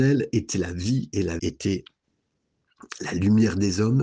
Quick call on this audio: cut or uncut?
cut